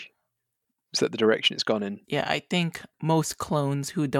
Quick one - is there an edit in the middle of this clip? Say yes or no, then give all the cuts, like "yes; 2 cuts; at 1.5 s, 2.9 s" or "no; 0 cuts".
yes; 2 cuts; at 2.0 s, 2.9 s